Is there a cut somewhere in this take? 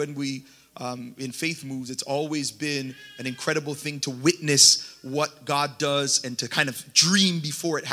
no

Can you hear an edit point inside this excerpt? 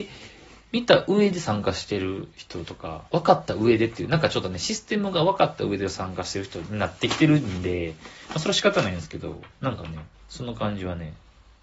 yes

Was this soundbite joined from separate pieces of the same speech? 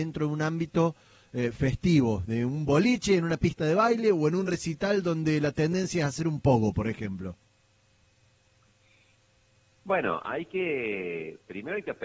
no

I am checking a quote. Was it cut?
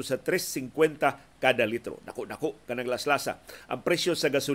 no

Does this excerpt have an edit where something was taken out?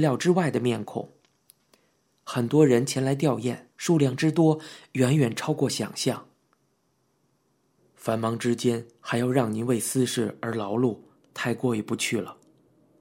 yes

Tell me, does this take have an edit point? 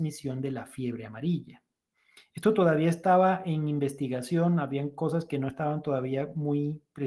no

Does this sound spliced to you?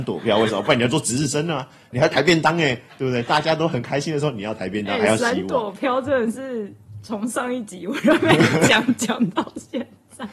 no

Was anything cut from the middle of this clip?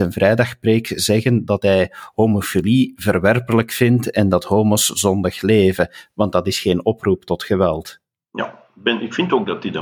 no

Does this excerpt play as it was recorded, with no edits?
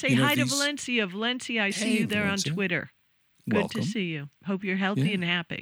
yes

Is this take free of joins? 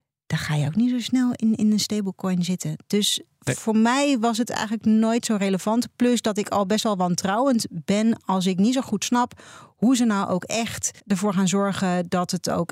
no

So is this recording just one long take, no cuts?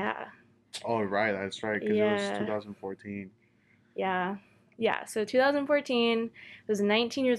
yes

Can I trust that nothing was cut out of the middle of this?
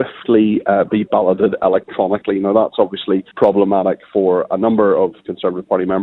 no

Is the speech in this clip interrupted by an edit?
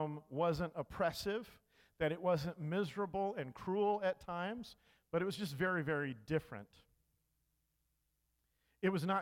no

